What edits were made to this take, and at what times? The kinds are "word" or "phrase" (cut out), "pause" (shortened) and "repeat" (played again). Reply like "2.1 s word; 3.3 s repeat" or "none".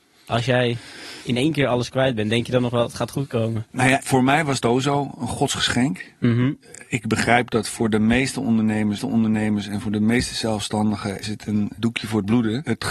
4.6 s word; 9.0 s repeat; 11.2 s word